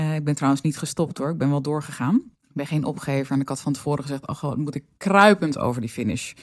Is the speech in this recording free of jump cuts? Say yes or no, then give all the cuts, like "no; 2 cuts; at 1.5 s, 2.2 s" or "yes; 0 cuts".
no; 1 cut; at 2.3 s